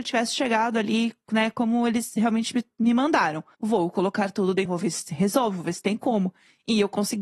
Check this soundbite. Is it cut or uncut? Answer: cut